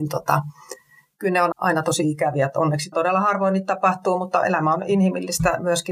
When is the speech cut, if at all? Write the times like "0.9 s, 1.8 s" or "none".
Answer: 1.5 s, 2.9 s